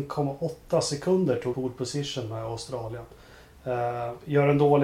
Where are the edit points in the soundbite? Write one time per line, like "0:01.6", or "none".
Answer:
0:01.5